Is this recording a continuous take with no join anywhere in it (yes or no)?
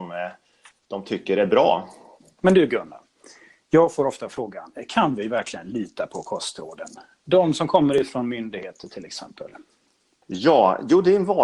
yes